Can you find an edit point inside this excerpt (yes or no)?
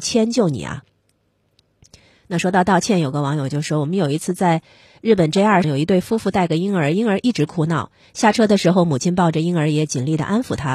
yes